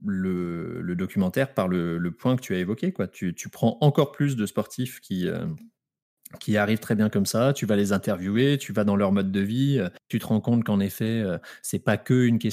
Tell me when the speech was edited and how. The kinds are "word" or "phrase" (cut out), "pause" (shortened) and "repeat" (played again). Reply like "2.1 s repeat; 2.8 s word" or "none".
10.0 s pause